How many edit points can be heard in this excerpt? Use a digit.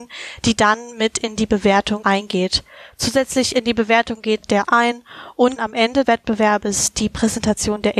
4